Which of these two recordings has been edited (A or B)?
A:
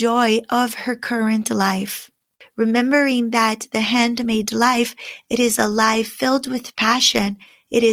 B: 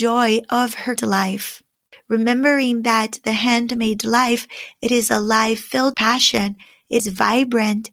B